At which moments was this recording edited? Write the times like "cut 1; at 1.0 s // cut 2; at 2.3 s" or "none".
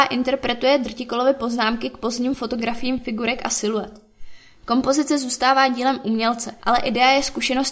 cut 1; at 6.6 s